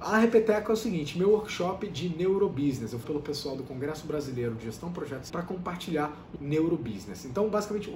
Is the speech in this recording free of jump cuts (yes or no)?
no